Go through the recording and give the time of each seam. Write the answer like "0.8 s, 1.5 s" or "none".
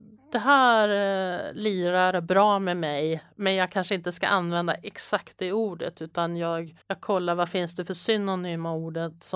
6.8 s